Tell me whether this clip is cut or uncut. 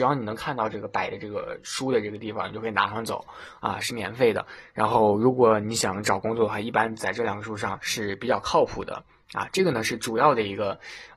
uncut